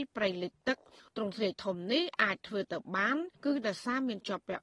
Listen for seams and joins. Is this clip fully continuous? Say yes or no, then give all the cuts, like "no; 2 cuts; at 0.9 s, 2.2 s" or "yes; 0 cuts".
no; 1 cut; at 3.3 s